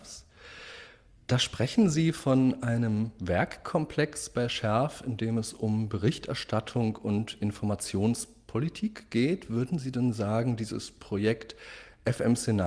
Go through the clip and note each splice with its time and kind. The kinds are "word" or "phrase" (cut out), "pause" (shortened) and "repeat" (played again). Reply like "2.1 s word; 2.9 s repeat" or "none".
none